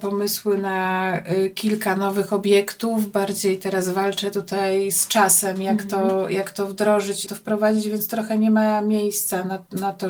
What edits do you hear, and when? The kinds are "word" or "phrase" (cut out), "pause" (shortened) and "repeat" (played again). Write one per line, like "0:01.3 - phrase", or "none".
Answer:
0:07.3 - word